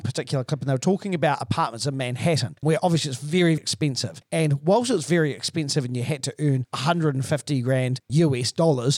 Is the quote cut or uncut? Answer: cut